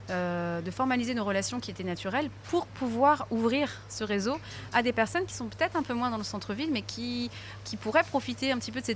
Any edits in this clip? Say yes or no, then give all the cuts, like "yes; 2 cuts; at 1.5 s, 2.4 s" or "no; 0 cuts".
no; 0 cuts